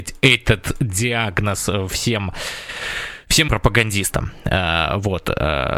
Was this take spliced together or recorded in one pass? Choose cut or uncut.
cut